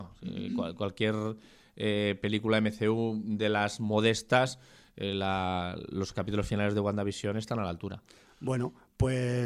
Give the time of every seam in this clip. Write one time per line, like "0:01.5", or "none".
none